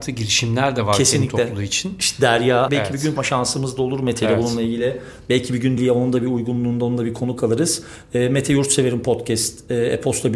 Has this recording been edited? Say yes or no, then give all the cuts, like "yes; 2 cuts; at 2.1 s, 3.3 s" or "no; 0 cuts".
yes; 3 cuts; at 2.7 s, 3.2 s, 5.8 s